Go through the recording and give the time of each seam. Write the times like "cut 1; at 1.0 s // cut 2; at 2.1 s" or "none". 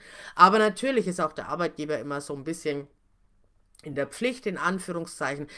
none